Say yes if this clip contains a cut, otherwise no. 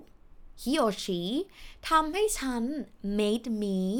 no